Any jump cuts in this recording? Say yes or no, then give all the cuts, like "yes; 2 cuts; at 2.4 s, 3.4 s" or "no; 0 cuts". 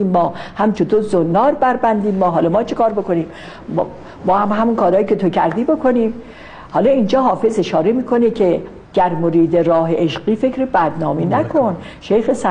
yes; 1 cut; at 8.9 s